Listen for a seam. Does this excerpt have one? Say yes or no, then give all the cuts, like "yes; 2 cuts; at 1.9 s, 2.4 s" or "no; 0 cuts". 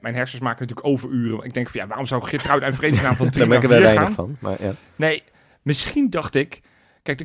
no; 0 cuts